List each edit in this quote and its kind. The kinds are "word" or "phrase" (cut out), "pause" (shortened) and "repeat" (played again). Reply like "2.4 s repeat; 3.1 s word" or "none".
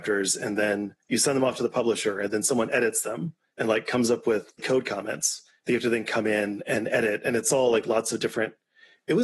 1.0 s pause; 4.6 s word

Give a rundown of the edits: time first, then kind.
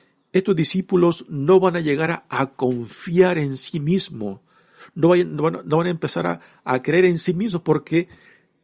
none

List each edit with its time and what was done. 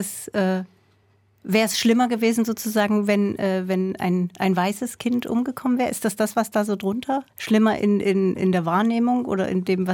7.3 s pause

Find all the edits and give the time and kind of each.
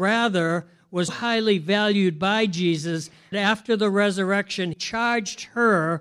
1.1 s word; 3.3 s word; 4.7 s word

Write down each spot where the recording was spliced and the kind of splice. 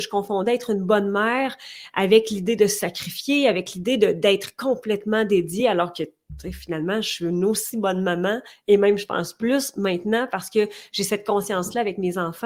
none

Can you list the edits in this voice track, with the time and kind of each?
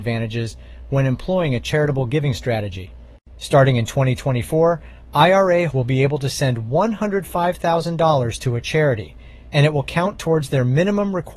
5.7 s word

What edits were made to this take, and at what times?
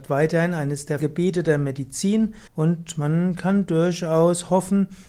1.0 s word; 2.5 s pause

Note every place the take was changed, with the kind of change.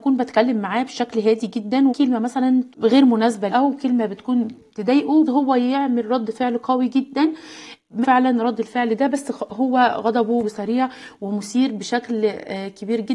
1.9 s word; 2.7 s word; 3.5 s word; 5.3 s word; 8.0 s word; 10.4 s word

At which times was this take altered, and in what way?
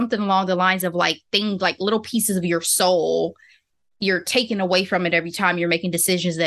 none

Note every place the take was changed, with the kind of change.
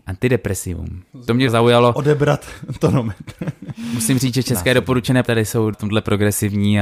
1.1 s pause; 1.5 s word; 5.2 s word; 5.7 s word

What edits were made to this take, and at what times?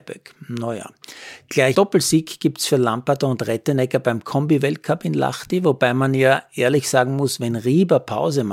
1.7 s word

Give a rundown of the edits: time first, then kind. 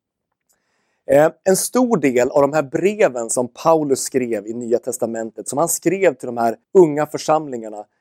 6.6 s pause

